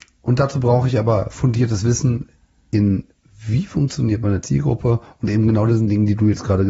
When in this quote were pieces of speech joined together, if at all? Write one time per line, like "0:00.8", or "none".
none